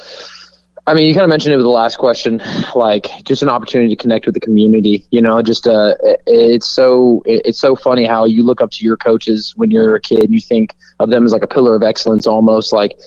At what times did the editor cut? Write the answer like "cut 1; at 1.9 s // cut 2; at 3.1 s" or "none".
none

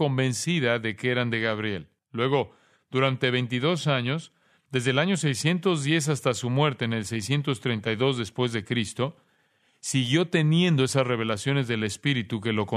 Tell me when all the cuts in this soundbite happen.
cut 1; at 2.0 s

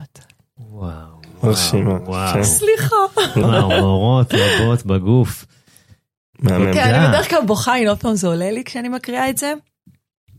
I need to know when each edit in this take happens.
cut 1; at 3.4 s

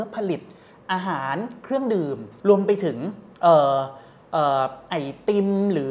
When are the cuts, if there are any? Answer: cut 1; at 2.4 s // cut 2; at 3.3 s

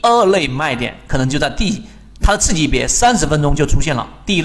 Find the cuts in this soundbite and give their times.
none

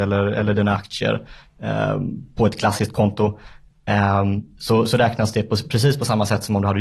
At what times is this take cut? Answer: none

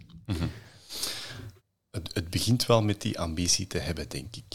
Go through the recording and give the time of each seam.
cut 1; at 1.6 s

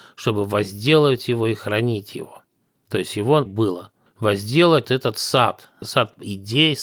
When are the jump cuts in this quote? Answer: cut 1; at 3.5 s // cut 2; at 4.8 s

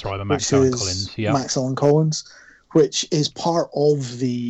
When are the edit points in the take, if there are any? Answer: none

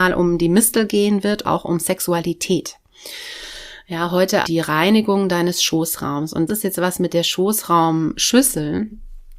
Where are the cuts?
cut 1; at 1.4 s // cut 2; at 4.4 s // cut 3; at 6.5 s

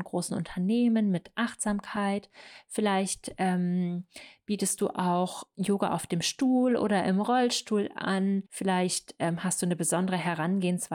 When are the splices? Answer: cut 1; at 8.5 s

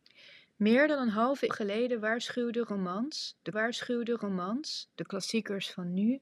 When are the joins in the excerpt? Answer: cut 1; at 1.5 s // cut 2; at 3.5 s

